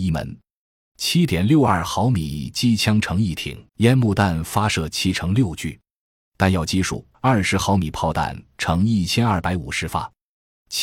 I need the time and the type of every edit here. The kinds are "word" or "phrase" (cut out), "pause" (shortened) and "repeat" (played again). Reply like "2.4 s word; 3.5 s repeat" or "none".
3.7 s pause; 7.1 s pause